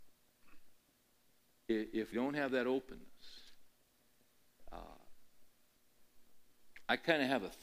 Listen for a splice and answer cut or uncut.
cut